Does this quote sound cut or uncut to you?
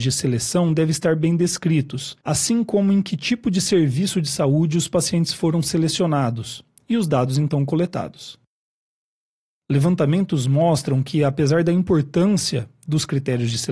cut